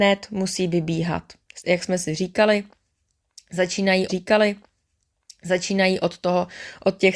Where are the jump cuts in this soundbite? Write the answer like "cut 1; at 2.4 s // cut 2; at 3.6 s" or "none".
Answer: cut 1; at 1.6 s // cut 2; at 4.1 s